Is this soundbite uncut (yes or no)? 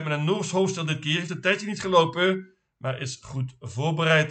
yes